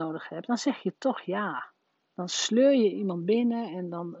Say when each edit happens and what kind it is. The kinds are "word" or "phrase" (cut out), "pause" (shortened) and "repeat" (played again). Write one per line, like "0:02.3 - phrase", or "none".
0:01.9 - pause

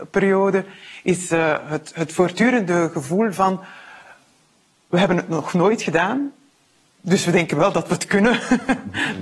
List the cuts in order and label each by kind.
none

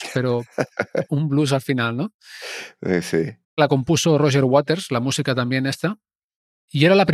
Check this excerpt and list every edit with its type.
0:03.4 - pause

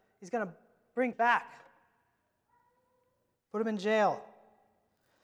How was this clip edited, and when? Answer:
0:01.1 - word

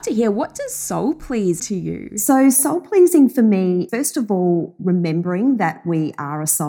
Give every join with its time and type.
0:01.6 - word
0:03.9 - word

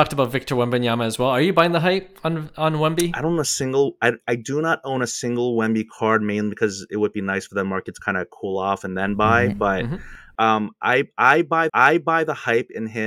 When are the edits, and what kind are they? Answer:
0:11.7 - repeat

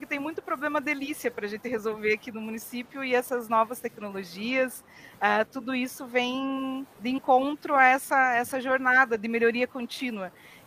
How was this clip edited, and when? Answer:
0:06.9 - pause

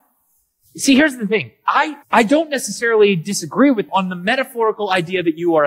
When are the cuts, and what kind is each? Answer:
0:02.0 - pause
0:03.9 - word

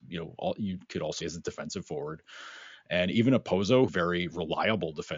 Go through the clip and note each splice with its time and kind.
0:01.2 - word
0:03.9 - word

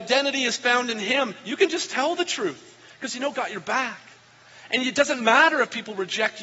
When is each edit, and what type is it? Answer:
0:03.3 - word

